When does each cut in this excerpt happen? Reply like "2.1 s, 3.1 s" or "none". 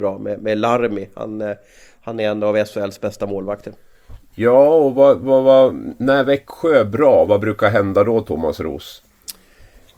none